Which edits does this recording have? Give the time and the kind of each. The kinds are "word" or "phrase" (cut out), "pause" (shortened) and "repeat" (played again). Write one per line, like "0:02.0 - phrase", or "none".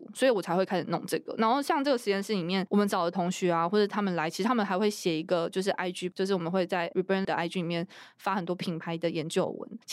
0:06.1 - word
0:06.9 - word
0:07.2 - word